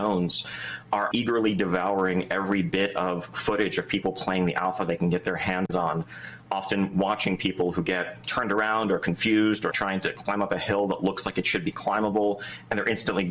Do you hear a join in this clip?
yes; 2 cuts; at 1.1 s, 9.7 s

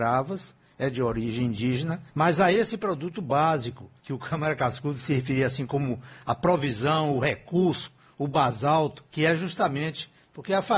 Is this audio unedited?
no; 3 cuts; at 2.1 s, 4.0 s, 9.1 s

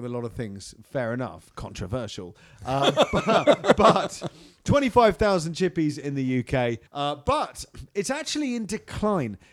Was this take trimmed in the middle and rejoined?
yes; 1 cut; at 6.9 s

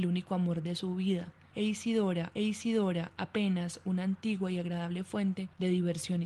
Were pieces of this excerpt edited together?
yes; 1 cut; at 2.3 s

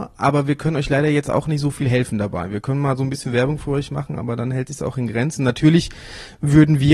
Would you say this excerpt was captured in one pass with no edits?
yes; 0 cuts

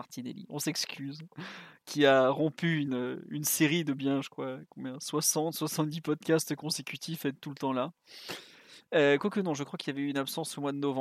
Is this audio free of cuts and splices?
yes; 0 cuts

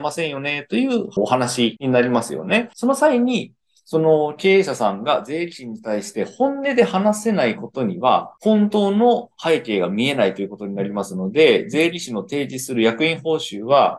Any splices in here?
no; 0 cuts

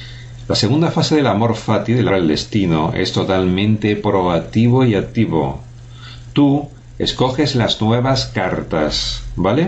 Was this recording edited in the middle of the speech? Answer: yes; 1 cut; at 2.1 s

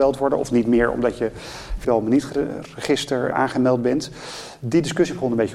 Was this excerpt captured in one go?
no; 2 cuts; at 1.8 s, 3.3 s

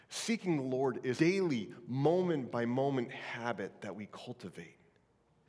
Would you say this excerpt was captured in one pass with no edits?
no; 1 cut; at 1.2 s

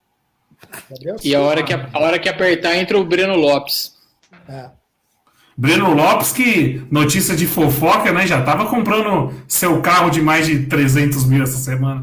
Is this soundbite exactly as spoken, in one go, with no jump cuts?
yes; 0 cuts

